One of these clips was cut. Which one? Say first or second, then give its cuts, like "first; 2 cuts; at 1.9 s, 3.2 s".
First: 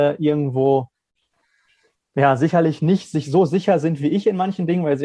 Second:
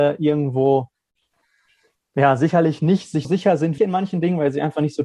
second; 2 cuts; at 3.2 s, 3.8 s